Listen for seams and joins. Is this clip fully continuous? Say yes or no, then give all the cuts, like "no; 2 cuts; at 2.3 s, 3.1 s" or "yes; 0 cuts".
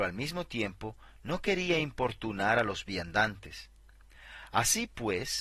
yes; 0 cuts